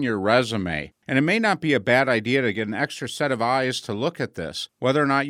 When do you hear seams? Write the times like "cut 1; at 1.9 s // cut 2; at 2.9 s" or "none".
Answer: none